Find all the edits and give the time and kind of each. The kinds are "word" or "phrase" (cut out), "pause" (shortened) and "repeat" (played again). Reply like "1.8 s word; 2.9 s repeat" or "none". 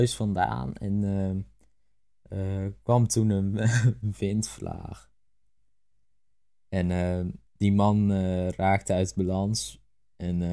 7.5 s pause